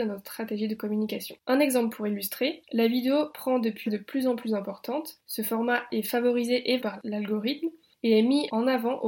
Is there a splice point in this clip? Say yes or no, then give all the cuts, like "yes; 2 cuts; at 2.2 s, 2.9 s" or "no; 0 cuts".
yes; 3 cuts; at 1.4 s, 3.9 s, 6.8 s